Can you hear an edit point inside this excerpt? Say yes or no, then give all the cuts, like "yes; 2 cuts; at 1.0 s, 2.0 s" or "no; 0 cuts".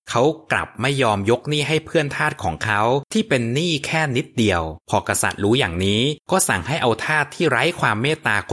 yes; 3 cuts; at 3.1 s, 4.8 s, 6.2 s